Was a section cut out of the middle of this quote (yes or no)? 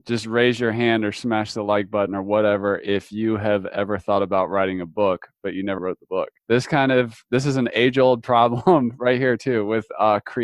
yes